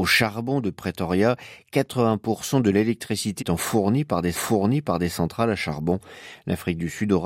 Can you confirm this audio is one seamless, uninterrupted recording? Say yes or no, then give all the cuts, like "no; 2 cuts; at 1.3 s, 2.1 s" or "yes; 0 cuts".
no; 2 cuts; at 3.4 s, 4.3 s